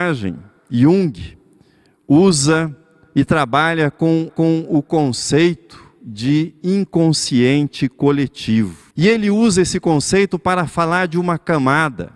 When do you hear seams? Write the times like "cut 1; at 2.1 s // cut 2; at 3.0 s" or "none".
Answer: cut 1; at 4.3 s // cut 2; at 8.9 s